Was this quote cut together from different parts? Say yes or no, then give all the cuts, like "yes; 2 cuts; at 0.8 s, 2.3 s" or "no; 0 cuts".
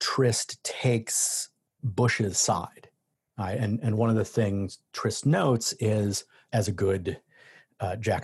no; 0 cuts